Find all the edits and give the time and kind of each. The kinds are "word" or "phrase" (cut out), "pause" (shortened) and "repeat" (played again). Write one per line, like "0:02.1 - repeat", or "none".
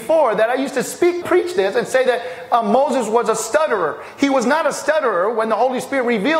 0:01.2 - word